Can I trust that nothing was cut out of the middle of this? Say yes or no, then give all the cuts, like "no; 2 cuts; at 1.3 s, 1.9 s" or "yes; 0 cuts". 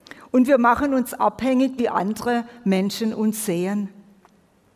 no; 1 cut; at 1.8 s